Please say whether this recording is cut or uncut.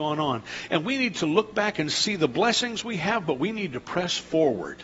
uncut